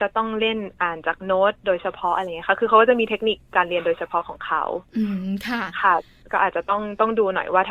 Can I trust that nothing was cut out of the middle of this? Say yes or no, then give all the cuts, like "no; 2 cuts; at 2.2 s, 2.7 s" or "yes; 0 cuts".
yes; 0 cuts